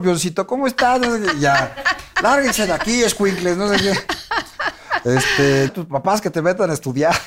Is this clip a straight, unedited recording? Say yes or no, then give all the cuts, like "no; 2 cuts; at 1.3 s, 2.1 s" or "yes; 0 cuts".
no; 1 cut; at 5.7 s